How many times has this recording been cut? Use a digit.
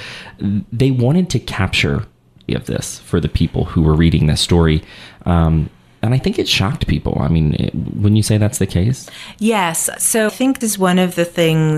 3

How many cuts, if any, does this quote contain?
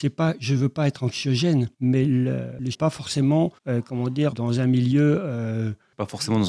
4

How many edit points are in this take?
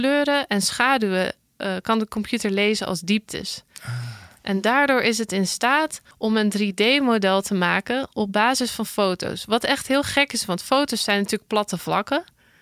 1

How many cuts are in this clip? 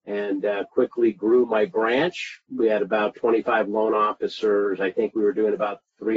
1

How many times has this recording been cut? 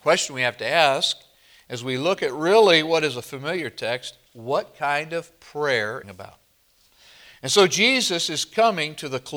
2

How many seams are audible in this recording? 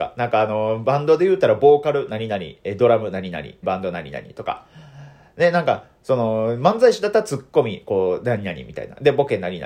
1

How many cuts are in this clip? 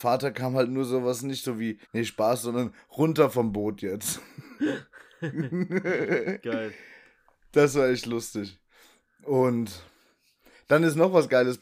1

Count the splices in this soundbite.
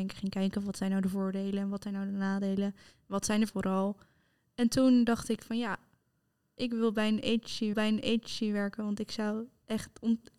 2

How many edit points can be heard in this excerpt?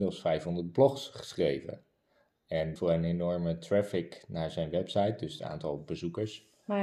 1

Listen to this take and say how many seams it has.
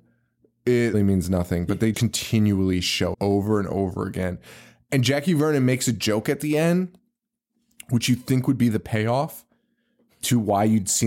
3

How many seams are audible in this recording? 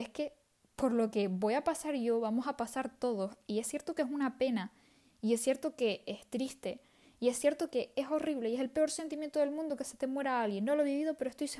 0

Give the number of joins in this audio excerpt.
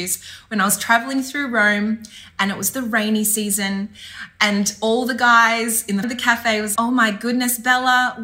2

